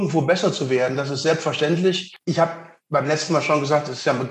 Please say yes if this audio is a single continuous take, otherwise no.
yes